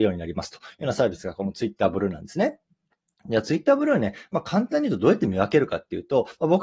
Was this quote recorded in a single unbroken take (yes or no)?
yes